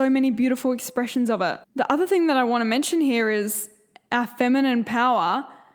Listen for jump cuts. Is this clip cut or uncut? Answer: cut